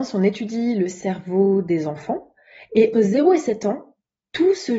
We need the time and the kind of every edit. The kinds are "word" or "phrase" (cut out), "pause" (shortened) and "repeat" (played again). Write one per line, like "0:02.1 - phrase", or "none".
0:02.9 - word